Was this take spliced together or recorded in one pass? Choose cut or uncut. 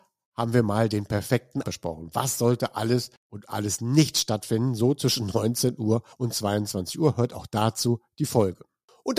cut